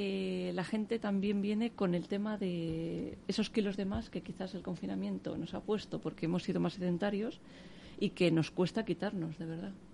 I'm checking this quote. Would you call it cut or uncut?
uncut